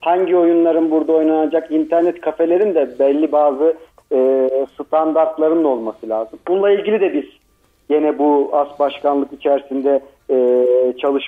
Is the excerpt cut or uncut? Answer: uncut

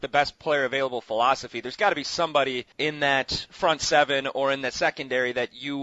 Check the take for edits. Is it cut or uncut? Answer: cut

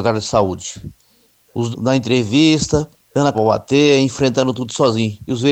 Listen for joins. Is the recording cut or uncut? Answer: cut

